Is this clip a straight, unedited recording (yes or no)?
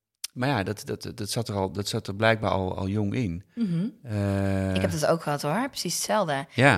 yes